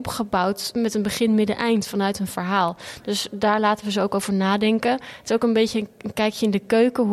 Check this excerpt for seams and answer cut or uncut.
uncut